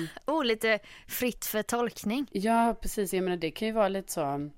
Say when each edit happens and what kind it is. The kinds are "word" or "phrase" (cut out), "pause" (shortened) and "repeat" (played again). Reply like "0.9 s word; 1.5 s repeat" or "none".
3.1 s word